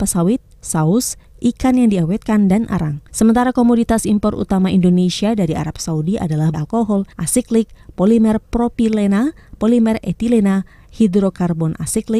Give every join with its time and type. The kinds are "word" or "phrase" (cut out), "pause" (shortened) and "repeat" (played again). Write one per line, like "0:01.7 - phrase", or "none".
0:03.1 - pause
0:06.5 - phrase
0:07.1 - pause

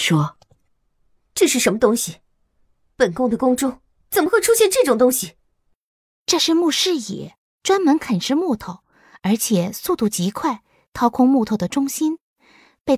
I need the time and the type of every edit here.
none

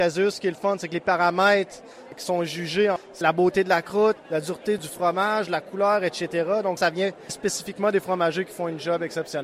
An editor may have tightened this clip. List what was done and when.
0:03.2 - word
0:06.8 - word

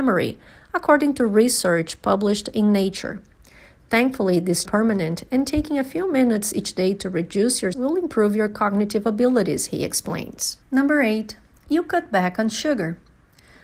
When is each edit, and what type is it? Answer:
0:04.7 - phrase
0:07.7 - word
0:10.6 - pause

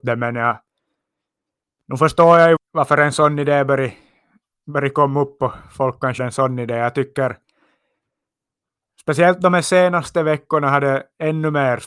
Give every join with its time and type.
0:02.6 - word
0:06.2 - phrase

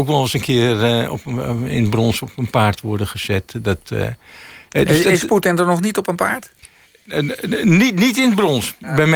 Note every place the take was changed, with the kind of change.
none

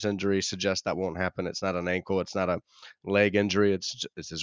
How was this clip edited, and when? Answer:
none

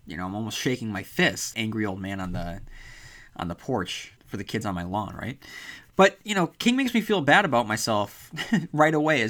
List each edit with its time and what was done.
0:01.5 - phrase
0:04.2 - pause

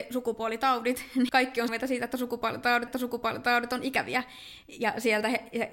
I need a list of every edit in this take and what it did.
0:01.3 - word
0:01.7 - word
0:02.9 - repeat

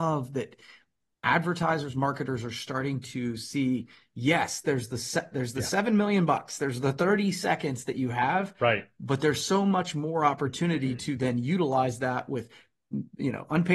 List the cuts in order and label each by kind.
none

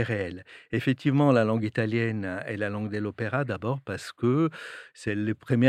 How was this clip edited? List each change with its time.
none

